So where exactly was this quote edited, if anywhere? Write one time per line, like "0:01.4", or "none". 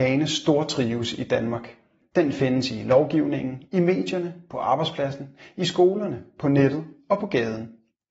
none